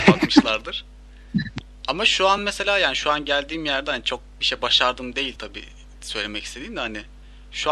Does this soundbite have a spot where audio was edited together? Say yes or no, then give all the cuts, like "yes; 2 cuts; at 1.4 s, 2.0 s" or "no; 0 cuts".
no; 0 cuts